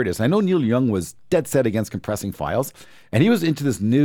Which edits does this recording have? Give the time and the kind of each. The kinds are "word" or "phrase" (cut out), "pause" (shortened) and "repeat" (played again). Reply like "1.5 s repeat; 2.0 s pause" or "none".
none